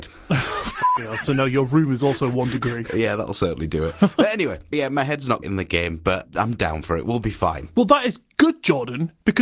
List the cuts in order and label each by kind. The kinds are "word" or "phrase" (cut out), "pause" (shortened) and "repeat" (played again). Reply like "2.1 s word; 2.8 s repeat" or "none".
4.7 s word; 5.4 s word